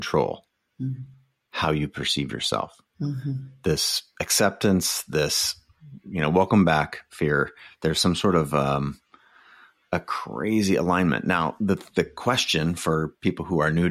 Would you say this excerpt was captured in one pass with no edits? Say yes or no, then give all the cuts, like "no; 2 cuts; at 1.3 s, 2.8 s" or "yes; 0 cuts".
yes; 0 cuts